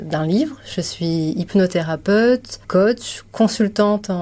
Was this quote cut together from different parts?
yes; 1 cut; at 2.6 s

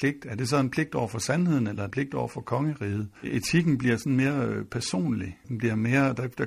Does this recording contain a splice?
yes; 3 cuts; at 1.9 s, 3.2 s, 5.4 s

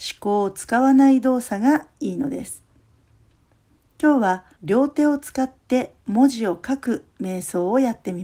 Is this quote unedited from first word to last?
no; 1 cut; at 4.6 s

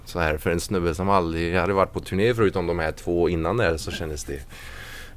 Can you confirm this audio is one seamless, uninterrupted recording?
yes; 0 cuts

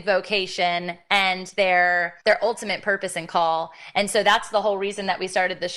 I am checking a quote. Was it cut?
yes; 1 cut; at 2.2 s

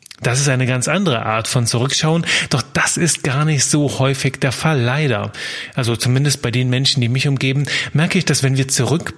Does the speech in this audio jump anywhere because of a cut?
no; 0 cuts

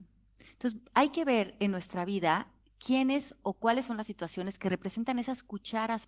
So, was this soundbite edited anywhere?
no; 0 cuts

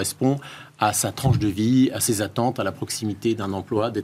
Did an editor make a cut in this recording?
no; 0 cuts

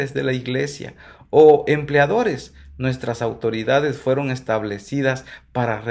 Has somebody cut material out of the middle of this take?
no; 0 cuts

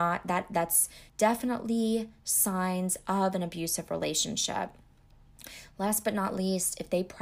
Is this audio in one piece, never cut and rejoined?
no; 1 cut; at 1.1 s

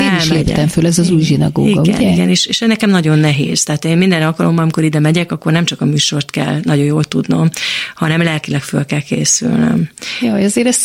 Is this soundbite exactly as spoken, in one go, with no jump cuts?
yes; 0 cuts

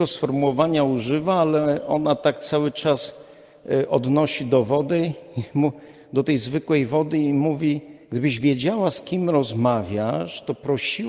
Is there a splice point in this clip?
yes; 1 cut; at 8.0 s

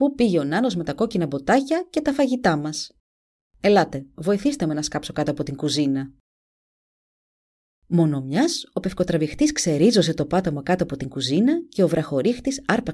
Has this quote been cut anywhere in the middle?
no; 0 cuts

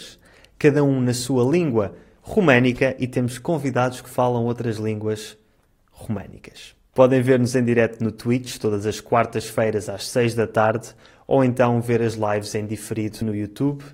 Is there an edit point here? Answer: no; 0 cuts

